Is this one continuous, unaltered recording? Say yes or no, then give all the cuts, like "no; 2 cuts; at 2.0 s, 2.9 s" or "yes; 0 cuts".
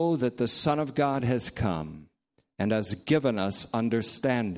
yes; 0 cuts